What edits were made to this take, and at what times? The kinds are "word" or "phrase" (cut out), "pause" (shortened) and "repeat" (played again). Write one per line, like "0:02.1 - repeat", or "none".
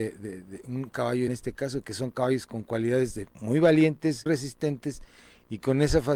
0:01.3 - phrase
0:03.3 - pause
0:04.3 - word

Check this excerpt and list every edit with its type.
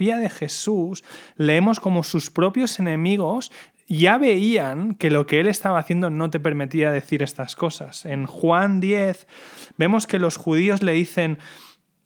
none

